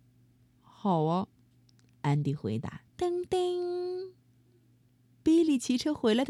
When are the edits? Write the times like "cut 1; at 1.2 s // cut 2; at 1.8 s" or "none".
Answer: cut 1; at 2.9 s